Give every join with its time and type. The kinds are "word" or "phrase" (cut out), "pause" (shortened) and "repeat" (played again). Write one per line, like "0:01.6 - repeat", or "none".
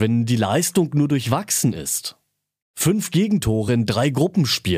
none